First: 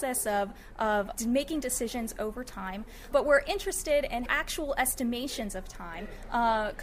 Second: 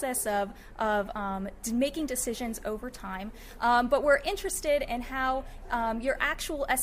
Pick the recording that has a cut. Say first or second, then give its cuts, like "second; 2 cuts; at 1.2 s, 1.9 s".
first; 3 cuts; at 1.1 s, 3.1 s, 4.3 s